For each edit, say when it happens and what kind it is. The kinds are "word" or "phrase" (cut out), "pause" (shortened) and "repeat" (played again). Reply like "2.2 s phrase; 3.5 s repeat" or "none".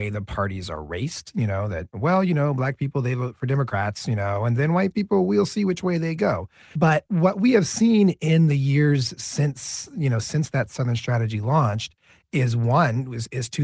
none